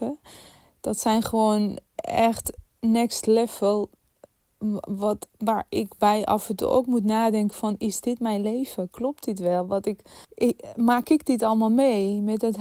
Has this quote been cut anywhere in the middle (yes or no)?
yes